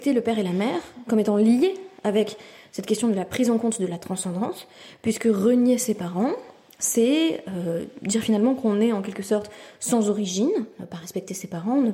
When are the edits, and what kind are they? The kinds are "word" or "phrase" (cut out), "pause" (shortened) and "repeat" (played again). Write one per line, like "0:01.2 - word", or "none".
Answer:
none